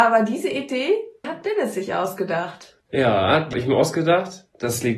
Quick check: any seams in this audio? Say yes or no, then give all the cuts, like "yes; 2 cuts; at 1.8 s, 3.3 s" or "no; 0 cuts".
yes; 3 cuts; at 1.2 s, 2.8 s, 3.5 s